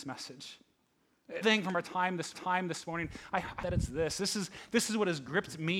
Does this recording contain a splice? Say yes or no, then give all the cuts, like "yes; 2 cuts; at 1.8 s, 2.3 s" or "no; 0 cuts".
yes; 3 cuts; at 1.4 s, 2.3 s, 3.6 s